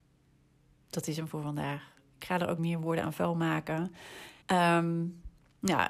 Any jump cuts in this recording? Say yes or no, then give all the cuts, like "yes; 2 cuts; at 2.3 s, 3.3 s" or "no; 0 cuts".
yes; 2 cuts; at 2.6 s, 4.4 s